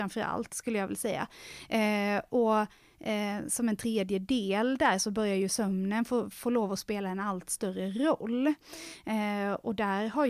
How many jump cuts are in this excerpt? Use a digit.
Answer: 0